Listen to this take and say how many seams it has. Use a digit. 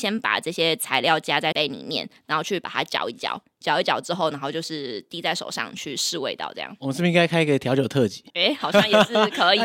2